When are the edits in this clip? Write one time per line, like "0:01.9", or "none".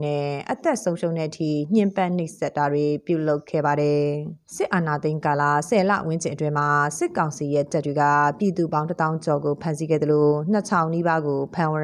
0:04.4